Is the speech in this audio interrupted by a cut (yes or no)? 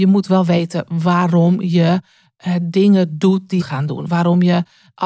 yes